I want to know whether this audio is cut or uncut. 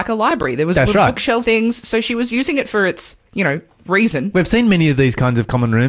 cut